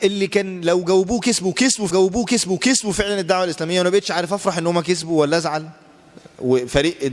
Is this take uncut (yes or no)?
no